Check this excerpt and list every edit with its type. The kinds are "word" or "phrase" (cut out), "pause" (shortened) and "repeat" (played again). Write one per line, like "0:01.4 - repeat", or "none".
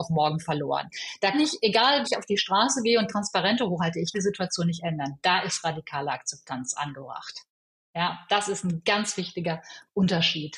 0:01.3 - word
0:02.0 - word
0:04.1 - word